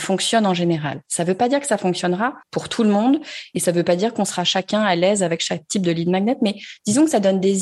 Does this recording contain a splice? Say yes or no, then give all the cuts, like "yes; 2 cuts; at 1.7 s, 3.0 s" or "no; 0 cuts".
yes; 1 cut; at 2.4 s